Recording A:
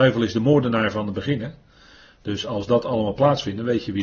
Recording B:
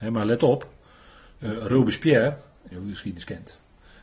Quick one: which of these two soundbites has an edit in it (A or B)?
B